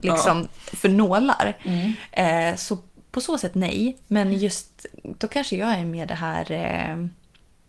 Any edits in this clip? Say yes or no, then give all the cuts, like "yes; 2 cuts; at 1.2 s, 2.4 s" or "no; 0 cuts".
yes; 1 cut; at 3.1 s